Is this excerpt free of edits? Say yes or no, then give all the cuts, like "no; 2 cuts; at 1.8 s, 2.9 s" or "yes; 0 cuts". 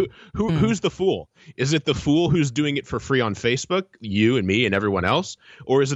yes; 0 cuts